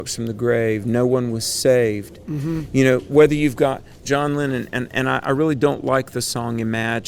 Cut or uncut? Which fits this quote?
uncut